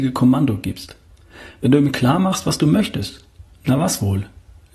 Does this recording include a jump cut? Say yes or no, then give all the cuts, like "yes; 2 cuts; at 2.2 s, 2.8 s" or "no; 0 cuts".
no; 0 cuts